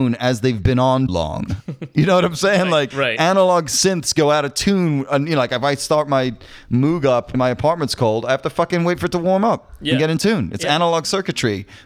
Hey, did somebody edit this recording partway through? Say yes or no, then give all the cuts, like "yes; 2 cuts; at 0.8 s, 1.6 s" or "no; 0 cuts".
yes; 3 cuts; at 1.1 s, 2.9 s, 7.3 s